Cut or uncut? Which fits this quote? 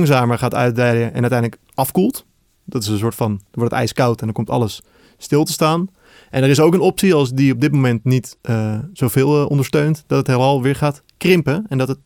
uncut